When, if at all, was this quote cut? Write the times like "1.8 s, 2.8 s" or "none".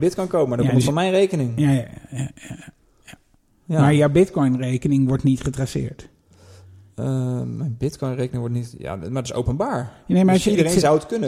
none